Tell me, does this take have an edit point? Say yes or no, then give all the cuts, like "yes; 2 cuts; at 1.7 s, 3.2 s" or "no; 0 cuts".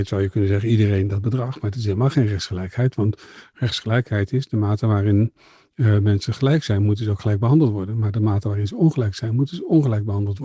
no; 0 cuts